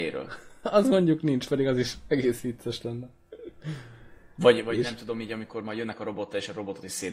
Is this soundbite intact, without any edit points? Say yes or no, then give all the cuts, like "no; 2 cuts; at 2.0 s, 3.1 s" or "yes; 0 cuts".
yes; 0 cuts